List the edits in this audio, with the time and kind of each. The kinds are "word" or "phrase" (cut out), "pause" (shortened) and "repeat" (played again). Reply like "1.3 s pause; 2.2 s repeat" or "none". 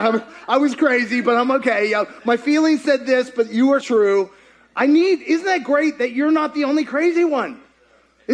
3.8 s word